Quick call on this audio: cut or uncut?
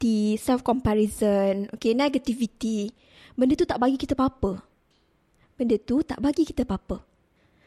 uncut